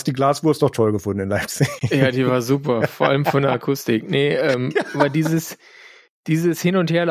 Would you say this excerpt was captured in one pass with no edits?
yes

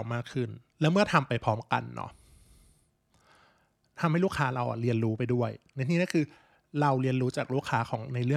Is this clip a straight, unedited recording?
yes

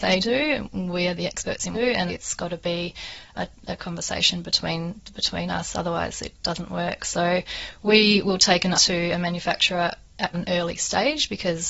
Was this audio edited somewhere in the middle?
yes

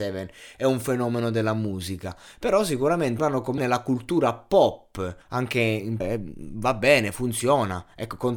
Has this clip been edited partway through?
yes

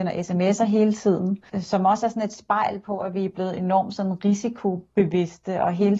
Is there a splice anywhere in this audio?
yes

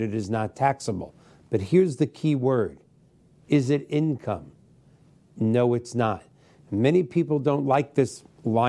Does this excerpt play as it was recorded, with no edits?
yes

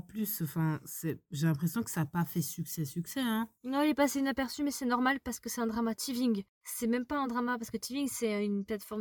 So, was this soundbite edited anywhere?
no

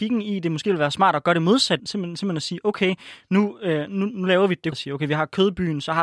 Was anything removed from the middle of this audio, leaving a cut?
yes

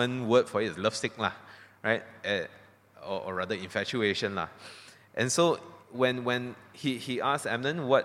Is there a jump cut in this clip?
no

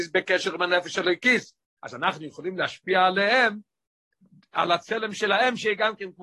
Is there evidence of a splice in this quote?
no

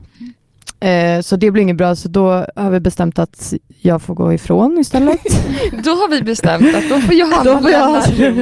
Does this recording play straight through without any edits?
yes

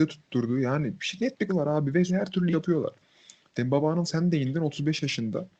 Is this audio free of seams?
no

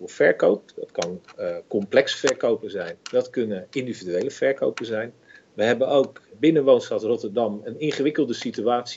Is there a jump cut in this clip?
yes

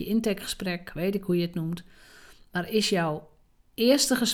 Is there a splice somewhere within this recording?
no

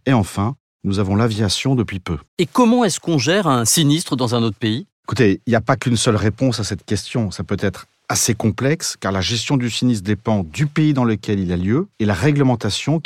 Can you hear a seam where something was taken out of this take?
yes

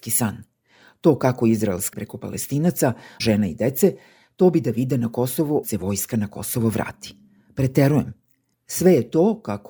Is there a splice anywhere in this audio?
yes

